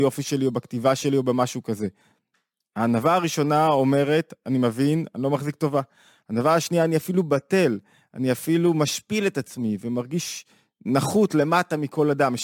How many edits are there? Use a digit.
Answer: 0